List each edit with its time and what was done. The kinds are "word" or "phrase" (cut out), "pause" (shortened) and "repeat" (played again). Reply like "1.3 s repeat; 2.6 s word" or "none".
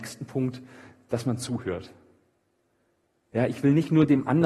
none

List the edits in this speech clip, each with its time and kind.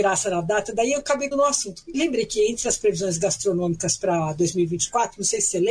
1.3 s word

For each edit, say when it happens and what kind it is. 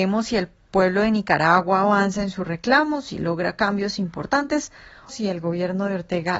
5.1 s word

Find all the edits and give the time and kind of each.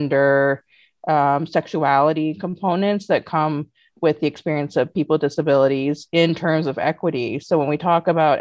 none

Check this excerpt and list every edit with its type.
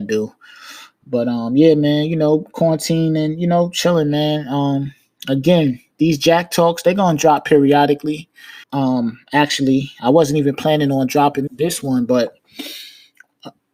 8.6 s pause; 11.5 s word

